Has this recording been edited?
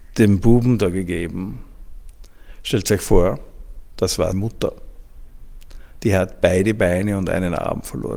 yes; 1 cut; at 4.3 s

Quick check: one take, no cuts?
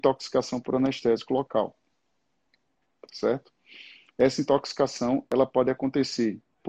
yes; 0 cuts

